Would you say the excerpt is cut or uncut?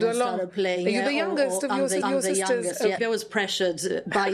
cut